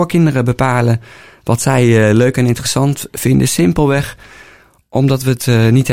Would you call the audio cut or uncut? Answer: uncut